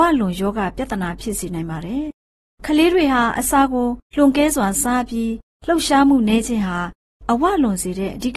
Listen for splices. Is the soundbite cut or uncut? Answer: cut